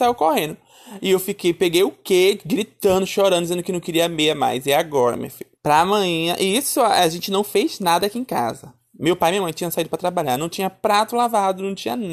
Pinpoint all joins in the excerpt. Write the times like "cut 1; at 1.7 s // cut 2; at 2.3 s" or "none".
cut 1; at 5.6 s

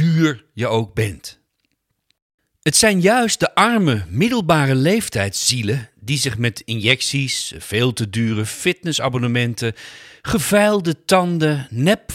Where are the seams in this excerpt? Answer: none

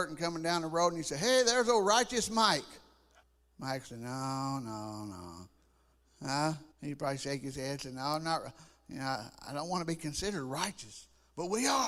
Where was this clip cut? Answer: cut 1; at 3.2 s // cut 2; at 6.7 s

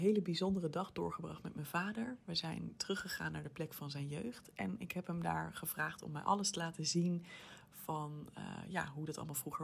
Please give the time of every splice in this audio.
none

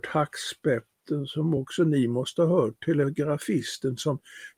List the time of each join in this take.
none

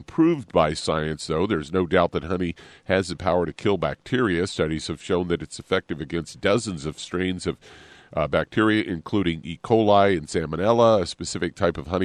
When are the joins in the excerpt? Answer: none

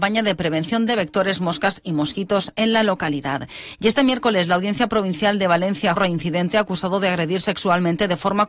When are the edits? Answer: cut 1; at 6.0 s

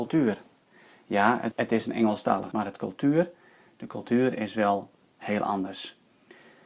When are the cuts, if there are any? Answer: cut 1; at 1.5 s // cut 2; at 2.5 s

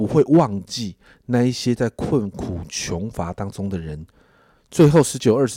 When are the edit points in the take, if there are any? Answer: none

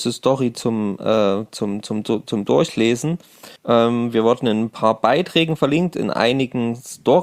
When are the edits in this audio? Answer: cut 1; at 3.6 s

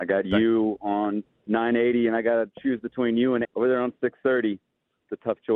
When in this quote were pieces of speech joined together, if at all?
cut 1; at 3.4 s

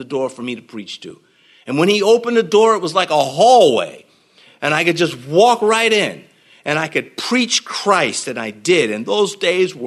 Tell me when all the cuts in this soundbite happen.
none

